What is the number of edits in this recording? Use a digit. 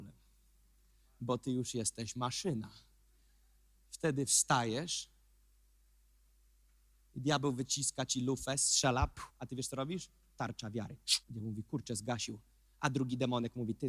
2